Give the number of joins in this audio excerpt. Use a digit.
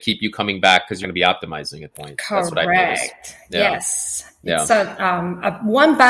3